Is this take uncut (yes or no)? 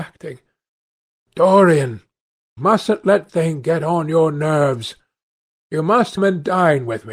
no